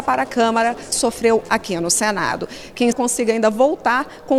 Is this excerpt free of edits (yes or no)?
no